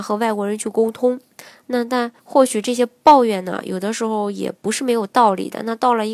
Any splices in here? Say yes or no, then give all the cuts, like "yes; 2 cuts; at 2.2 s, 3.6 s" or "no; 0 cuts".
yes; 1 cut; at 2.2 s